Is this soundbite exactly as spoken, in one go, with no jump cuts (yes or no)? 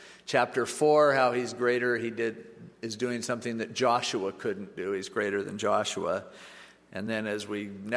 yes